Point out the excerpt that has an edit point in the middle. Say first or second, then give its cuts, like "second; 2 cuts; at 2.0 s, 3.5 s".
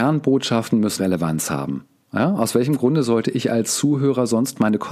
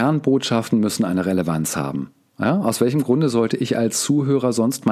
first; 1 cut; at 1.0 s